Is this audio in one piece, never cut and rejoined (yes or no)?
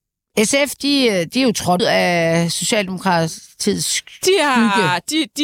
no